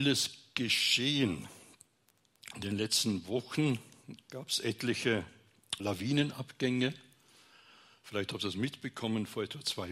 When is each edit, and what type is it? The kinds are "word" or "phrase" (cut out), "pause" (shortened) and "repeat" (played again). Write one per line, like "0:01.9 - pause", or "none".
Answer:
0:05.8 - word